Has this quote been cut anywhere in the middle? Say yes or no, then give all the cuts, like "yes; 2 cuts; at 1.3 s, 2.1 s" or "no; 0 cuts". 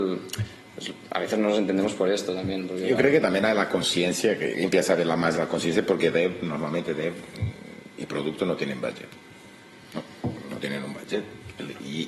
no; 0 cuts